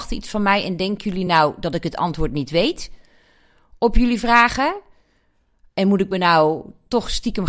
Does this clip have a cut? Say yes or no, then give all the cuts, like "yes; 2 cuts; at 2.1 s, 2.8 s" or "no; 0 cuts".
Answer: no; 0 cuts